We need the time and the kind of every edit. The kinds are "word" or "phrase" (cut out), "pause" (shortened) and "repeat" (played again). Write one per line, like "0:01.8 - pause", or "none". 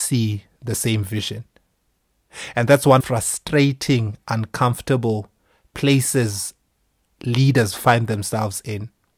0:03.0 - phrase